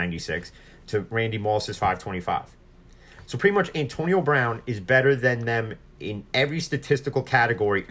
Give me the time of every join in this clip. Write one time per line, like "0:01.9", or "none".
0:06.3